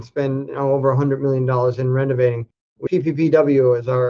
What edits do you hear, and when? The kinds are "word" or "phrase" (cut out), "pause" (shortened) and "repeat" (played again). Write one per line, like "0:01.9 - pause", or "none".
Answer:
0:02.9 - word